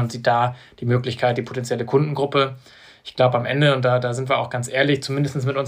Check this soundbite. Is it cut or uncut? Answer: uncut